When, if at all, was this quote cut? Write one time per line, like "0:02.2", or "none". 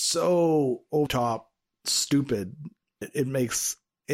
0:01.1
0:03.0